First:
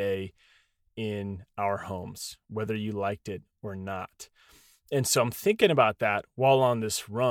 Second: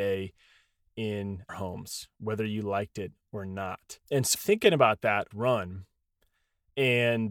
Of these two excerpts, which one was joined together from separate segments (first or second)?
second